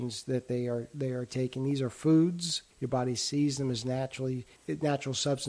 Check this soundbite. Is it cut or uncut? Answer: cut